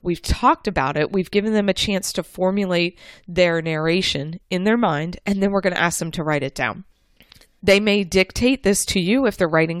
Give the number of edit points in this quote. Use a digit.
0